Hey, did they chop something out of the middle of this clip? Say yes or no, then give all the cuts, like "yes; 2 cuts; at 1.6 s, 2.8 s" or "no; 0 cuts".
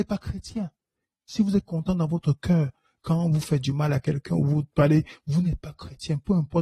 no; 0 cuts